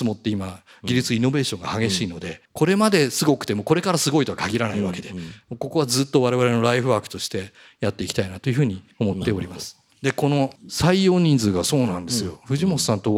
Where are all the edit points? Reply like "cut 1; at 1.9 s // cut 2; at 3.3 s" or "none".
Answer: cut 1; at 2.4 s // cut 2; at 8.9 s